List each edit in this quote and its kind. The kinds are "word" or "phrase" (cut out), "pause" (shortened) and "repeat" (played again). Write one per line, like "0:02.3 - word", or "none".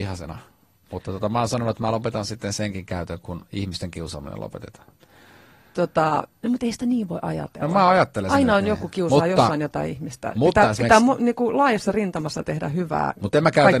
none